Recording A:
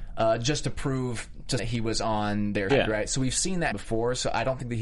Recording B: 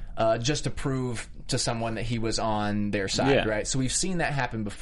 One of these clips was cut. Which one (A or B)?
A